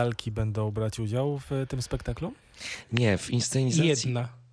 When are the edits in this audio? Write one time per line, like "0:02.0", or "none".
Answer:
none